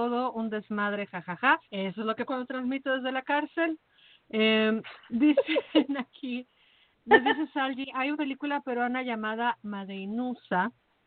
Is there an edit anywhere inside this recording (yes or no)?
yes